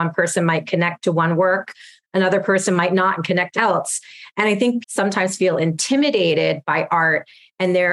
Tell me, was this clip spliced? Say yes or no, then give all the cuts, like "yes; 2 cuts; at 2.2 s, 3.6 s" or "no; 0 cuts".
yes; 2 cuts; at 3.5 s, 4.8 s